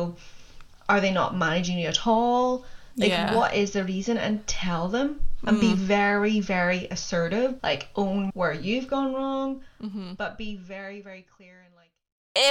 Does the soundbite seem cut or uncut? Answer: cut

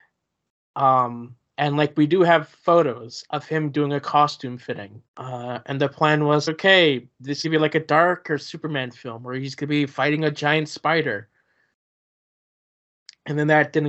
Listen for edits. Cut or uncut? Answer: cut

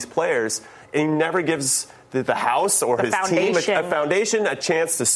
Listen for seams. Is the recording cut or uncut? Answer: uncut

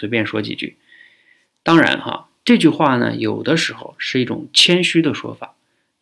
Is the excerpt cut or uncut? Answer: uncut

